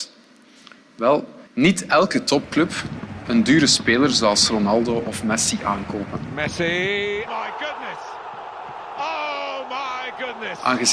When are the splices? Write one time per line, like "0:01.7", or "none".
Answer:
0:01.5
0:03.3
0:07.3